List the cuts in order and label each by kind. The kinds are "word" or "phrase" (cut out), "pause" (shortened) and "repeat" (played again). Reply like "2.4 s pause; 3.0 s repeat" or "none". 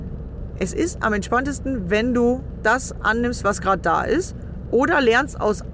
2.5 s word